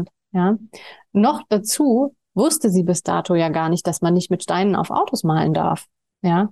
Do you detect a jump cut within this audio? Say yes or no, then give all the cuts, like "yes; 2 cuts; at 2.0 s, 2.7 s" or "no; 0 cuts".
no; 0 cuts